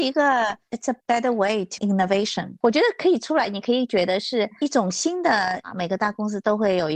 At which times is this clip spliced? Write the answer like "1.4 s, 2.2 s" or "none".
1.0 s, 1.8 s, 2.6 s